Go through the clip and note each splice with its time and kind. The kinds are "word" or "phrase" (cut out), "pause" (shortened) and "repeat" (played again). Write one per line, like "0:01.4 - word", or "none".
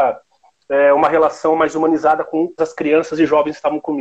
0:02.6 - word